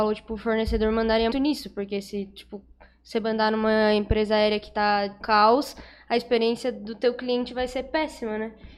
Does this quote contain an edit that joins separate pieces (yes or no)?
yes